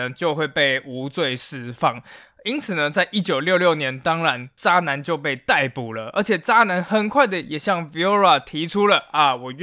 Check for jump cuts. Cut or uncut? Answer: uncut